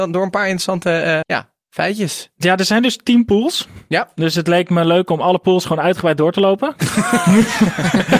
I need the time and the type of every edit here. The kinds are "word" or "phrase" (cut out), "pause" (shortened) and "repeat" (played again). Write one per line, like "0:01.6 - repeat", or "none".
0:01.2 - word